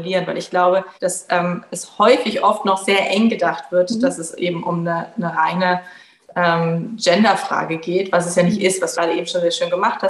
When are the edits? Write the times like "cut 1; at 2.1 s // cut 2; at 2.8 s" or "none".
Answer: cut 1; at 1.0 s // cut 2; at 8.9 s